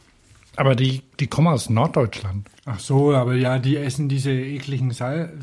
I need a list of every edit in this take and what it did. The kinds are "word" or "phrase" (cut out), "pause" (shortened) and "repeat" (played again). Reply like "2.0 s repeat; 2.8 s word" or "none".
2.6 s pause